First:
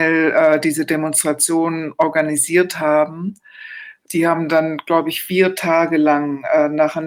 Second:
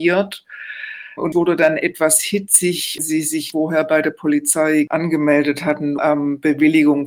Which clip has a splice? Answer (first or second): second